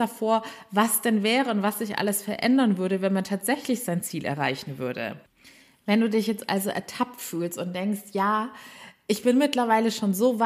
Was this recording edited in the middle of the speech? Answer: no; 0 cuts

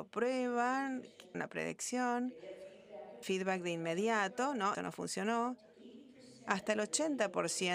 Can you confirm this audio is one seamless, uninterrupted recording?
no; 3 cuts; at 1.3 s, 3.2 s, 4.7 s

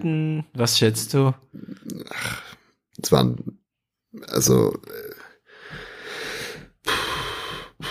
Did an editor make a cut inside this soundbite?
no; 0 cuts

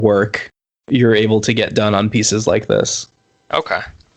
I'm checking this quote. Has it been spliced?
no; 0 cuts

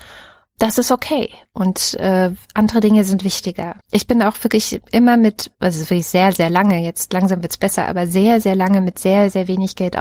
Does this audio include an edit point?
yes; 2 cuts; at 3.8 s, 5.5 s

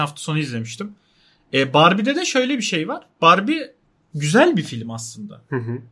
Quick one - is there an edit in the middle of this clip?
no; 0 cuts

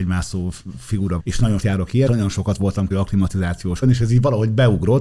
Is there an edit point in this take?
yes; 5 cuts; at 1.2 s, 1.6 s, 2.1 s, 2.9 s, 3.8 s

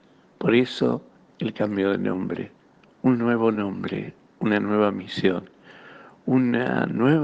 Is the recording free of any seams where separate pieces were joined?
yes; 0 cuts

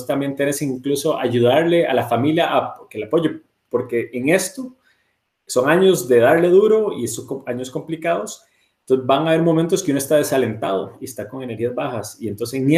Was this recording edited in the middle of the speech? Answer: no; 0 cuts

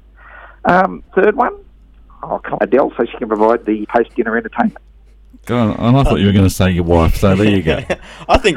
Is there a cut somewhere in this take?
yes; 3 cuts; at 1.1 s, 2.6 s, 3.8 s

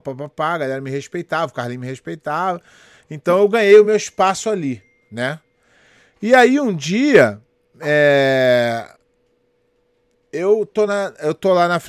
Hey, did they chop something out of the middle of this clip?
no; 0 cuts

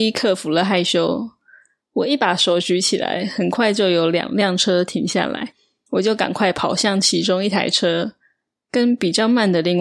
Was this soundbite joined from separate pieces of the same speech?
no; 0 cuts

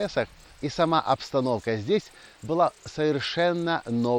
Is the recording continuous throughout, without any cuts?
yes; 0 cuts

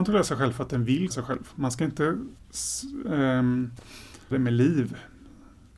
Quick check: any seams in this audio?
yes; 3 cuts; at 1.1 s, 2.4 s, 4.3 s

